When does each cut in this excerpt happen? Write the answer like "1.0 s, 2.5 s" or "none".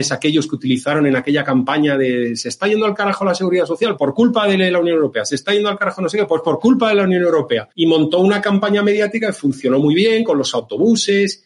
4.0 s, 7.7 s